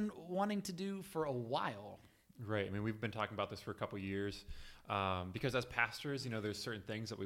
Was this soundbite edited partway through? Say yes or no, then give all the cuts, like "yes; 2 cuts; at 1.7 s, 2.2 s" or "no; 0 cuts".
no; 0 cuts